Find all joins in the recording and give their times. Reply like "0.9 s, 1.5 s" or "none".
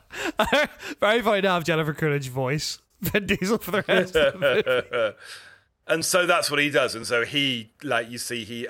none